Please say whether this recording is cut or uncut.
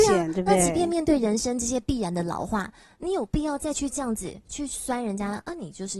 uncut